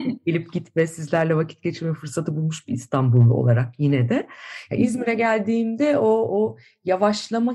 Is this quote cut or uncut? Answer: uncut